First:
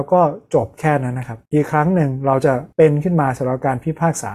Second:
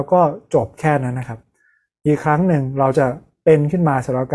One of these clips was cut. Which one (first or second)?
first